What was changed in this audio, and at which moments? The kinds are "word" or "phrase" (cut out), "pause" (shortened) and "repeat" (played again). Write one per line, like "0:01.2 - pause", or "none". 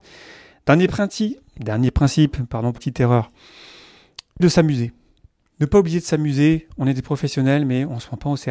0:02.8 - word
0:04.4 - word

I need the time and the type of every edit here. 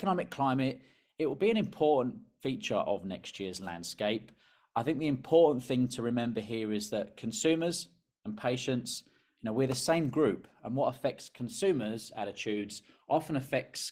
none

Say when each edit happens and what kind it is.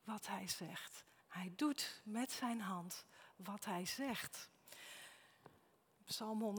0:01.2 - pause

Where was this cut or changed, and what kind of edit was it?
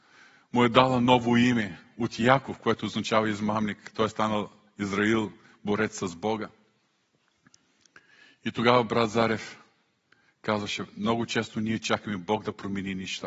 none

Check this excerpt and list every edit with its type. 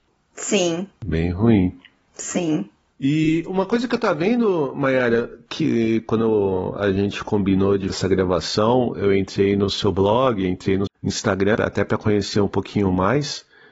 0:07.9 - word
0:10.9 - word
0:11.6 - word

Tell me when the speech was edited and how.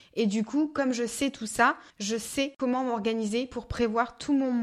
0:01.9 - pause

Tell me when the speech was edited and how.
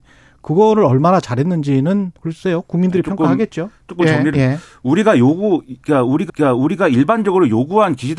0:02.2 - pause
0:04.3 - word
0:06.3 - repeat

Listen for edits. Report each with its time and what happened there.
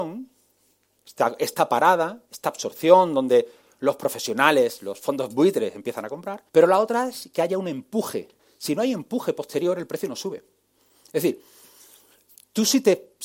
0:06.5 - pause
0:08.4 - pause

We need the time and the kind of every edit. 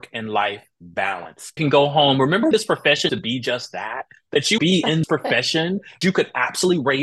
0:01.6 - word
0:02.5 - word
0:03.1 - word
0:04.6 - word
0:05.0 - word
0:06.0 - word

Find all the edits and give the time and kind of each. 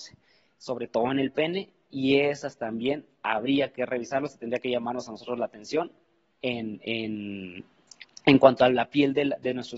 none

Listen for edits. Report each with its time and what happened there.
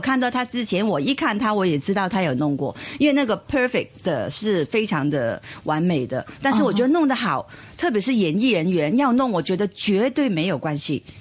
none

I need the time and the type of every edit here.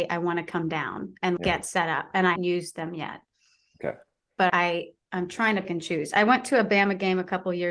0:01.4 - word
0:02.4 - word
0:04.5 - word
0:05.6 - word

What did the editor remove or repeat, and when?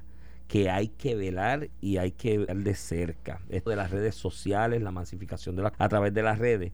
0:02.5 - word
0:03.7 - word
0:05.7 - word

